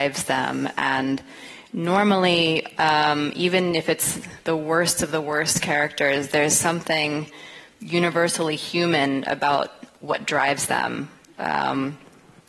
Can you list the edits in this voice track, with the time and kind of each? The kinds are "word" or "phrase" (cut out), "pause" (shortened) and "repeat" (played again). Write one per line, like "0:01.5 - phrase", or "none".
none